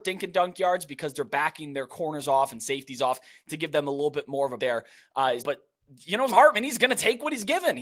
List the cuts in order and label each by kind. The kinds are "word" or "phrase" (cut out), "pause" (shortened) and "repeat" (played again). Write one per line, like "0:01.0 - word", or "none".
0:04.6 - word
0:05.4 - word
0:06.3 - word